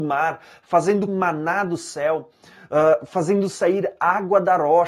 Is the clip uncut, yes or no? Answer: no